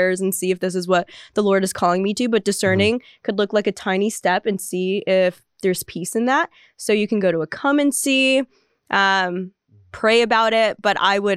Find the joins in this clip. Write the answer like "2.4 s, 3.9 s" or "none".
none